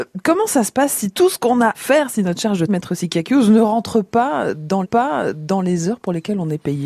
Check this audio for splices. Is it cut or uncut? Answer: cut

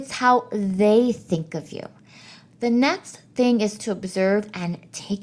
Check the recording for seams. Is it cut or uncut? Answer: uncut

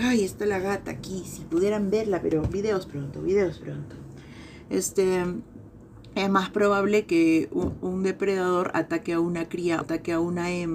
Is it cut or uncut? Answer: cut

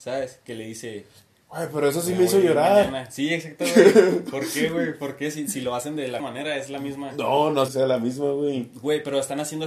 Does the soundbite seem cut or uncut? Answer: cut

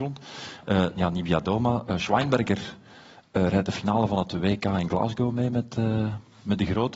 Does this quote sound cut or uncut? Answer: uncut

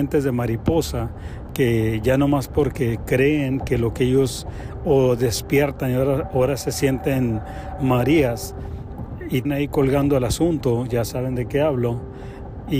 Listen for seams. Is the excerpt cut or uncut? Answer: cut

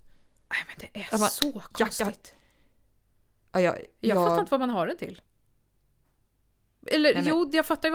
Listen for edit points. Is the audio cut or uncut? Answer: uncut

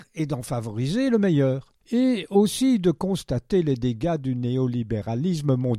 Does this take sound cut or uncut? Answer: uncut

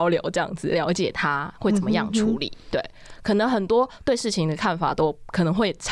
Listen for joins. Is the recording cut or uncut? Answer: uncut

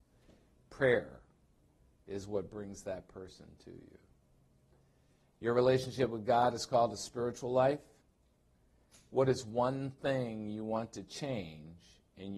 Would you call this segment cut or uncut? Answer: uncut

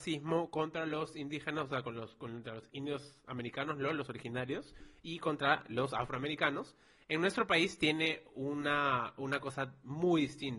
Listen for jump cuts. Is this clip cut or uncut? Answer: uncut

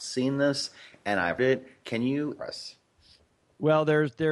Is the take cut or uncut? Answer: cut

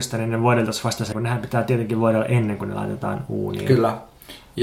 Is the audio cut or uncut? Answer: cut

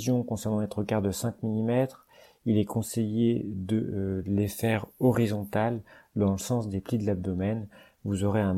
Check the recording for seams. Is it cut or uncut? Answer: uncut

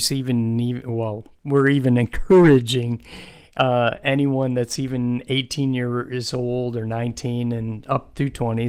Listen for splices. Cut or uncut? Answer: uncut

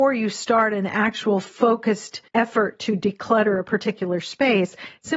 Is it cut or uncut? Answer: cut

